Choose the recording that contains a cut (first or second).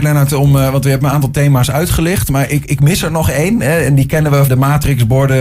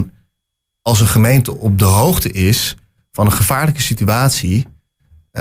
first